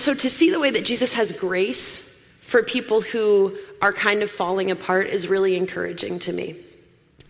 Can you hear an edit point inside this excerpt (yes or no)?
no